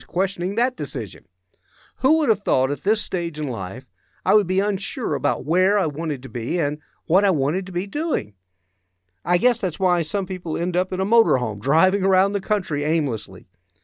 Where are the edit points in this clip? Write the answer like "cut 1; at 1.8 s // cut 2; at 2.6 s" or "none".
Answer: none